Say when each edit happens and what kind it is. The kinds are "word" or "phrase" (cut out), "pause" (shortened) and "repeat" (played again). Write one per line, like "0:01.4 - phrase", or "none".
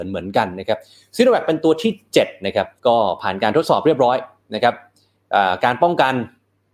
0:02.8 - pause

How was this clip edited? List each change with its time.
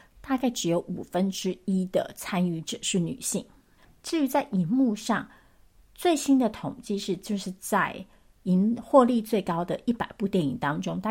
none

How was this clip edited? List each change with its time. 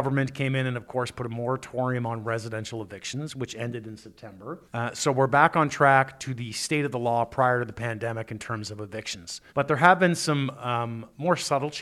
0:04.7 - pause
0:09.5 - pause

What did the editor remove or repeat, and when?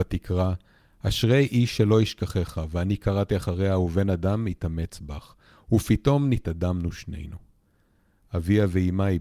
none

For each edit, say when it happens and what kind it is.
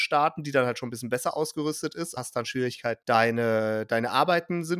0:02.2 - word
0:03.0 - word

